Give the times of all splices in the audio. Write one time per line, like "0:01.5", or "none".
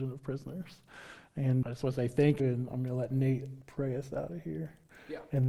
0:01.6
0:02.4
0:03.6